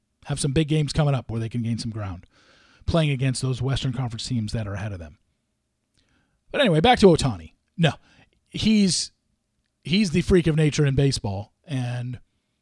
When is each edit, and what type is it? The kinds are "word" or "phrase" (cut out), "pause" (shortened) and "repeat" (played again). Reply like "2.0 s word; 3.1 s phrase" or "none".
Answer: none